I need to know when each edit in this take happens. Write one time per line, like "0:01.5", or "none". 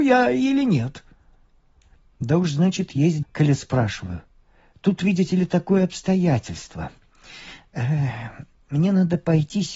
0:03.2